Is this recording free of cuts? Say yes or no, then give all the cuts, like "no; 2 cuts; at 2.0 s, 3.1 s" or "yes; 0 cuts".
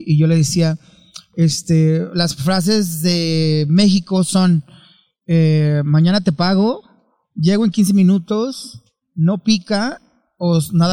yes; 0 cuts